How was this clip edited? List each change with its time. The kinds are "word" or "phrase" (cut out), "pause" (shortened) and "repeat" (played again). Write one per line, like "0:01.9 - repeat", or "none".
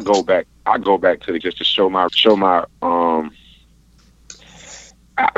0:01.4 - word
0:02.1 - word